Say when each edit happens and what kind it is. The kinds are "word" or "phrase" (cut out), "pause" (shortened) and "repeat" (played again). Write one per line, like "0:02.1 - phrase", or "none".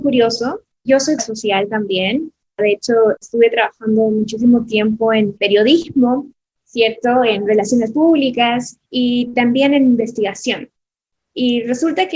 0:01.2 - word
0:03.2 - word
0:08.9 - pause